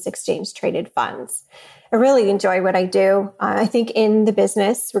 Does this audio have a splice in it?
no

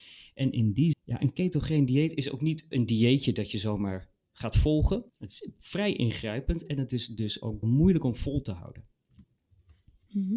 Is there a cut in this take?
yes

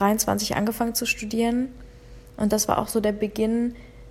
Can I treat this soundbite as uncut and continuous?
yes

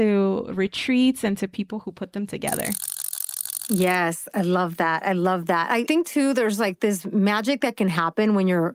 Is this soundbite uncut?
yes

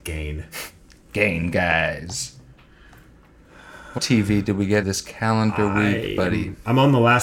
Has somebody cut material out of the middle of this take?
yes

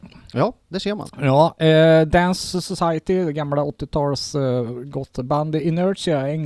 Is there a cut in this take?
no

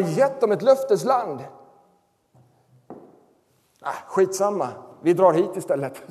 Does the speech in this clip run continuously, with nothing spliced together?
yes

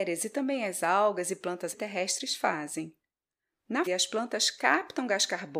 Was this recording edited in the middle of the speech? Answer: yes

